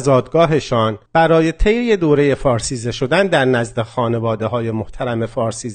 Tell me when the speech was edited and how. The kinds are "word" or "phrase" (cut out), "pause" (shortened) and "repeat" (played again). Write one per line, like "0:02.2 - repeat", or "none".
0:01.1 - pause